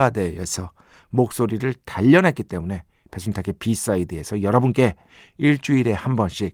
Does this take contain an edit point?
no; 0 cuts

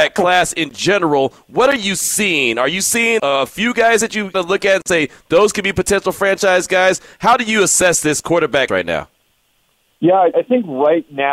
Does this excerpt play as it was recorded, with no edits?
no; 4 cuts; at 3.2 s, 4.3 s, 8.7 s, 10.3 s

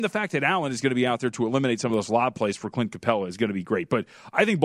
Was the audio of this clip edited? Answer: no; 0 cuts

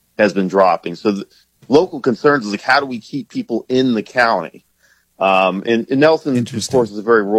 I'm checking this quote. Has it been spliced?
no; 0 cuts

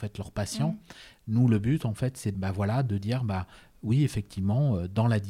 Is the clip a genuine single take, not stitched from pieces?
no; 1 cut; at 2.3 s

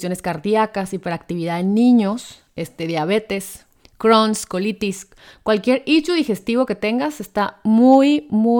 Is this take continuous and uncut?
yes; 0 cuts

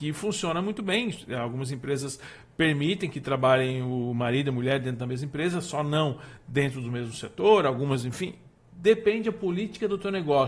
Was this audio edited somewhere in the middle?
no; 0 cuts

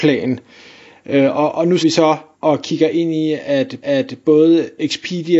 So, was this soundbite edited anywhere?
yes; 3 cuts; at 1.8 s, 2.3 s, 3.8 s

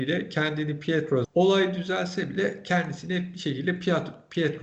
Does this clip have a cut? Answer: yes; 1 cut; at 1.2 s

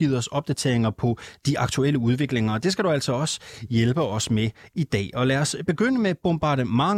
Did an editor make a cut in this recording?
no; 0 cuts

